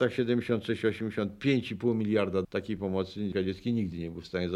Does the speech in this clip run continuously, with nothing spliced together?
no; 2 cuts; at 2.4 s, 3.3 s

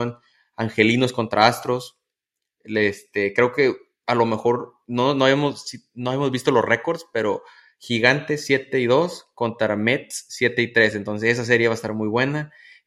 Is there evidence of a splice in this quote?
no; 0 cuts

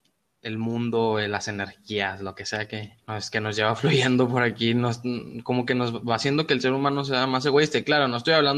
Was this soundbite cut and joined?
yes; 1 cut; at 3.0 s

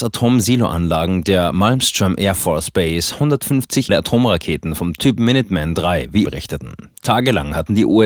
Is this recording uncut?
no; 2 cuts; at 3.9 s, 6.2 s

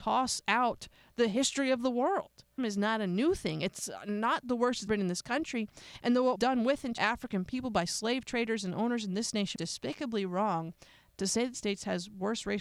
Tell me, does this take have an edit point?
yes; 6 cuts; at 2.6 s, 4.9 s, 6.4 s, 7.0 s, 9.6 s, 11.5 s

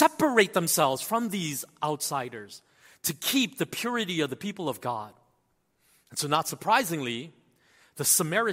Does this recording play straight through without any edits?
yes; 0 cuts

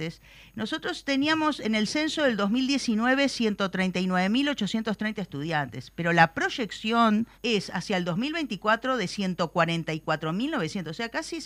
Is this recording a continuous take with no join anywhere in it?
no; 1 cut; at 7.3 s

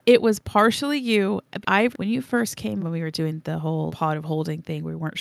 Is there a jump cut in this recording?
yes; 4 cuts; at 1.6 s, 1.9 s, 2.8 s, 3.9 s

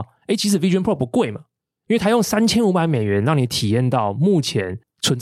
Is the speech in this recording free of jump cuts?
yes; 0 cuts

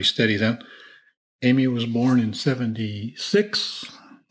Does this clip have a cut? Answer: no; 0 cuts

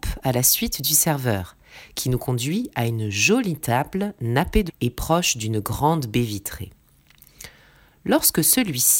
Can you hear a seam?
yes; 1 cut; at 4.7 s

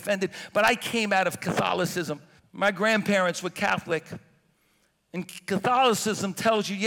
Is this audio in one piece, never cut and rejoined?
no; 1 cut; at 2.4 s

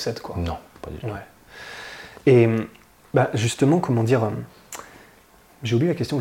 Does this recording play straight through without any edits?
yes; 0 cuts

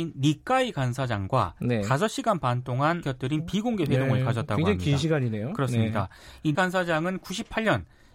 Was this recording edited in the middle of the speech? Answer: yes; 2 cuts; at 3.0 s, 6.5 s

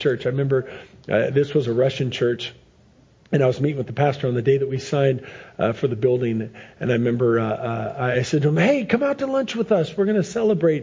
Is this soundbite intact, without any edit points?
yes; 0 cuts

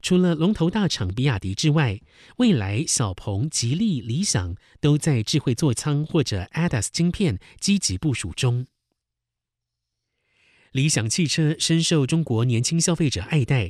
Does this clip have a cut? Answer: no; 0 cuts

